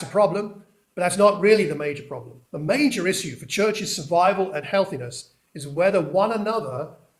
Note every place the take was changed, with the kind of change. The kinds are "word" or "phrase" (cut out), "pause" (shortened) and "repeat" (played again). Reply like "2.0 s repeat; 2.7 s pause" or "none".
2.5 s pause